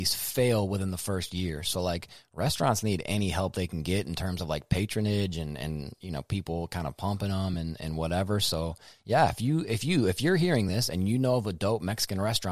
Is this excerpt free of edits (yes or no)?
yes